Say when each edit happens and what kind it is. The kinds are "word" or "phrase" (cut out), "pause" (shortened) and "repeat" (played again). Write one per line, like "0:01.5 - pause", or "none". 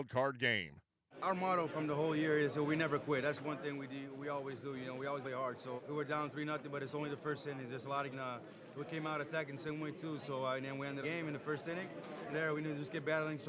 0:05.2 - phrase
0:05.8 - word
0:08.1 - phrase
0:11.0 - phrase
0:12.3 - phrase

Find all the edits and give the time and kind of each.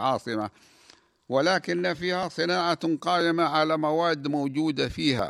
none

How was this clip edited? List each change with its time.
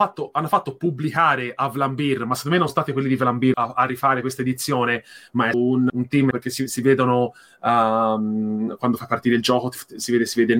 0:02.7 - word
0:03.5 - word
0:05.5 - word
0:05.9 - word
0:06.3 - word

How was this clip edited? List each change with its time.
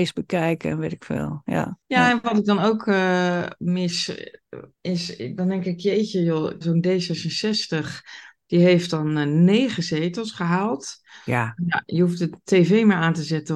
0:01.8 - pause
0:04.7 - pause
0:06.6 - word

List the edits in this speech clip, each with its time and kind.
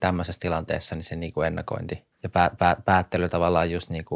0:02.1 - pause
0:02.6 - repeat

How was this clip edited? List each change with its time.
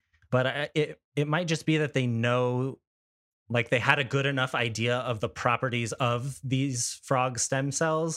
none

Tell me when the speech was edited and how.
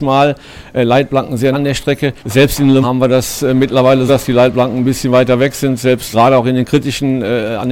0:01.5 - word
0:02.2 - pause
0:02.8 - word
0:04.1 - word
0:06.1 - word

